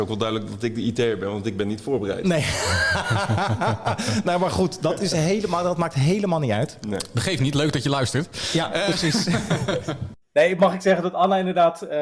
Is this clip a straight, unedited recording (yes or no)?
yes